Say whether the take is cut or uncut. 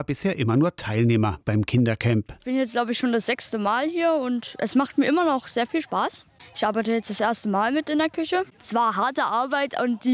uncut